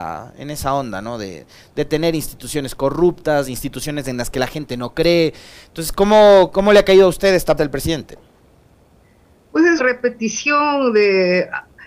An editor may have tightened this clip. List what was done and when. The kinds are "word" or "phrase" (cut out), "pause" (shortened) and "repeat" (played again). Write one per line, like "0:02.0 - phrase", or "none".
0:07.6 - word
0:09.8 - word